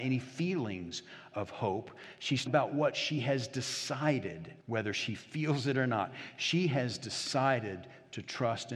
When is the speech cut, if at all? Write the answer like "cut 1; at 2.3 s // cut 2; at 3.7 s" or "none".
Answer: cut 1; at 2.5 s // cut 2; at 4.6 s